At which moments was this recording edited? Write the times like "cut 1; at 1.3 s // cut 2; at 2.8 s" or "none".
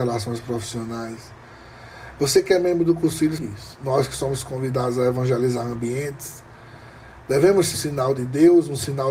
cut 1; at 3.4 s // cut 2; at 7.7 s